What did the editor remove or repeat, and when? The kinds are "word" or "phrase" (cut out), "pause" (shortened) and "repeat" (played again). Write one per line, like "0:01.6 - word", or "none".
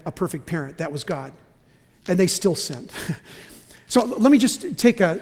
none